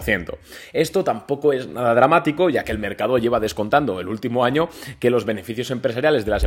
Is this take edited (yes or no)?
no